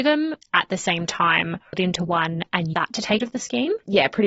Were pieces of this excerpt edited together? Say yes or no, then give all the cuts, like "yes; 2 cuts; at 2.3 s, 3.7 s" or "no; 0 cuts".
yes; 3 cuts; at 1.7 s, 2.7 s, 3.2 s